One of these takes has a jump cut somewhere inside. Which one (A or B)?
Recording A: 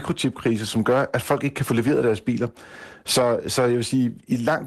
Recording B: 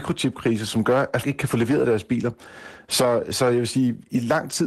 B